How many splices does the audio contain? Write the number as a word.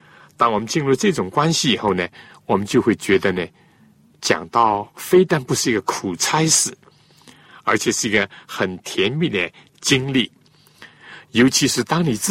zero